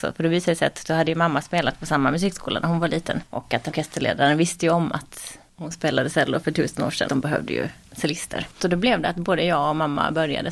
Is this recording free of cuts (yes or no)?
no